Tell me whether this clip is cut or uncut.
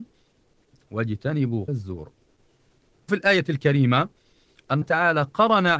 cut